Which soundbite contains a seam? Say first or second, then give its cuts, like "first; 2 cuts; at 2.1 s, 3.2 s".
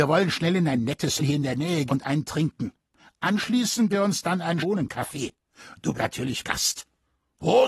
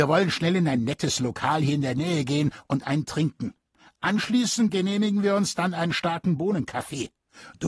first; 6 cuts; at 1.2 s, 1.9 s, 3.9 s, 4.6 s, 5.9 s, 6.4 s